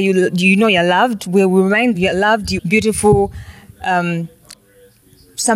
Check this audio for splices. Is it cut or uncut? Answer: cut